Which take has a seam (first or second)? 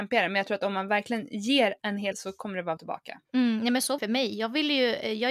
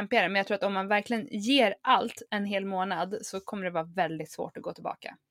first